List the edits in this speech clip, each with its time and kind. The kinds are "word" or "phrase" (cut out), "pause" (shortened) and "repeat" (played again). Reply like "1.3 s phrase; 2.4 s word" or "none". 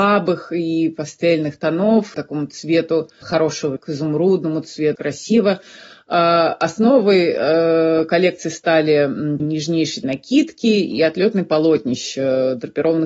2.1 s word; 3.2 s word; 3.8 s word; 5.0 s word; 9.4 s word; 10.0 s word